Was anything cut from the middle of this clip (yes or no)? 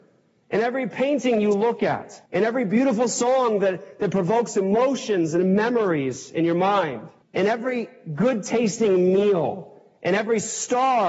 yes